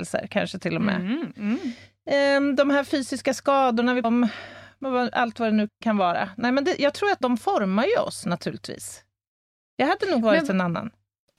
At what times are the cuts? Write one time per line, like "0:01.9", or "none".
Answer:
0:04.0
0:05.7
0:07.2